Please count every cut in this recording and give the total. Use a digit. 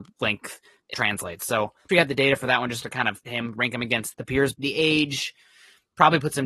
5